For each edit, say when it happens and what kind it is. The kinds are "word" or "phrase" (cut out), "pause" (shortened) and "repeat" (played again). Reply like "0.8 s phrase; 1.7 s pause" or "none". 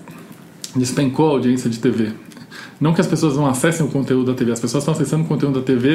none